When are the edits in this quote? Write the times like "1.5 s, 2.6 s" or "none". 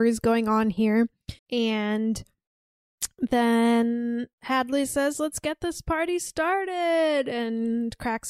1.4 s, 4.3 s